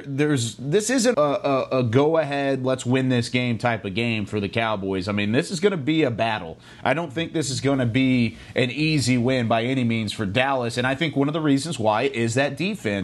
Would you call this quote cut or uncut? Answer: cut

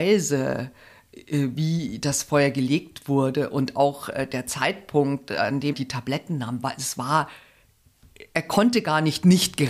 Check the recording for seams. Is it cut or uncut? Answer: cut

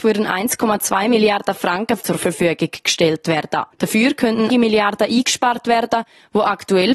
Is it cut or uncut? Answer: cut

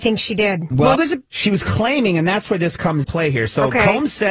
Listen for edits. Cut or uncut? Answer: cut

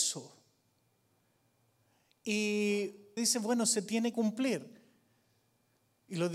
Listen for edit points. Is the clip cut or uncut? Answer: cut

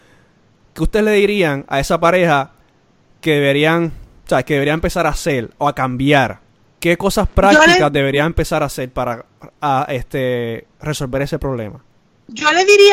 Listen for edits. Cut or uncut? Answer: uncut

